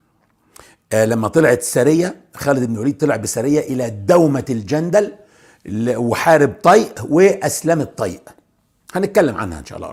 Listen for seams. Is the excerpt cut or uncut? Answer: uncut